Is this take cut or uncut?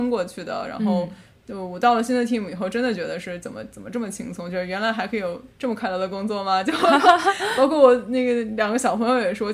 cut